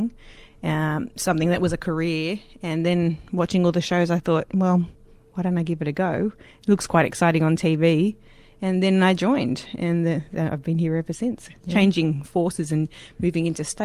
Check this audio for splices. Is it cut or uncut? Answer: uncut